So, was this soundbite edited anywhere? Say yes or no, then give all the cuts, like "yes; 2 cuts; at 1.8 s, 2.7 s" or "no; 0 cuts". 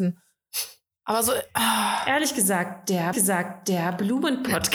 yes; 1 cut; at 3.1 s